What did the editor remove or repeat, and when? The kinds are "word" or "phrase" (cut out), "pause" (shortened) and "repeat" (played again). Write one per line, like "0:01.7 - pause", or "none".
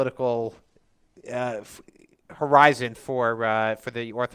none